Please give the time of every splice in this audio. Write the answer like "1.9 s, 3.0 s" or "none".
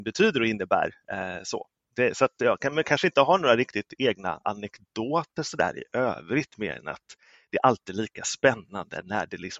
none